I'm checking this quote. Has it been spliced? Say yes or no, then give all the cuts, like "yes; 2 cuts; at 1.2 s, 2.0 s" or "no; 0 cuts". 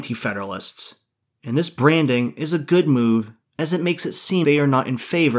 yes; 1 cut; at 4.4 s